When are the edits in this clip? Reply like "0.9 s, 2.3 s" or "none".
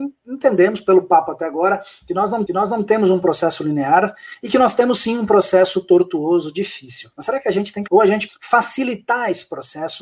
2.5 s, 7.1 s, 7.9 s, 8.3 s